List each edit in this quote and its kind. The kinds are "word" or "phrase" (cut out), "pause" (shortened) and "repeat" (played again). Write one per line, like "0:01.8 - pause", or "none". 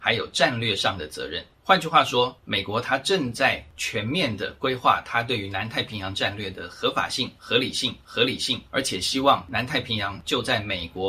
0:08.0 - repeat